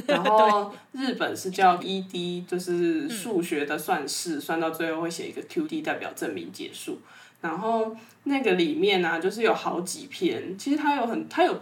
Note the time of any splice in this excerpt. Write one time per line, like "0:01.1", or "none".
0:01.8
0:02.5
0:05.6